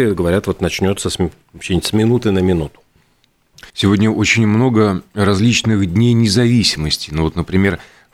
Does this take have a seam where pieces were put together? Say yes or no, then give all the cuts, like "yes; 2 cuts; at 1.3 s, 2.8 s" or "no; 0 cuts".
yes; 1 cut; at 3.7 s